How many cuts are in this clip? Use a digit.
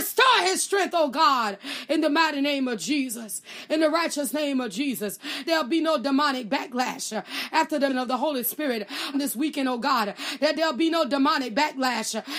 3